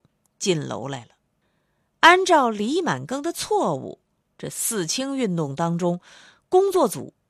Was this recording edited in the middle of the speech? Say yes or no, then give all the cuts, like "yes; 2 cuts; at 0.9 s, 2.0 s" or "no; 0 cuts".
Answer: yes; 1 cut; at 1.4 s